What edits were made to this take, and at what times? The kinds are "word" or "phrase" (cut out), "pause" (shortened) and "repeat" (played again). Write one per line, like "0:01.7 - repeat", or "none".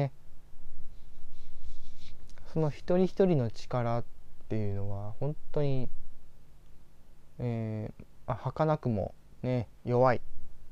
none